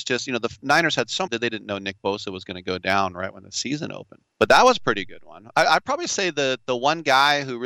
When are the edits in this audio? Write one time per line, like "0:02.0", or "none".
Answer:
0:01.3
0:04.3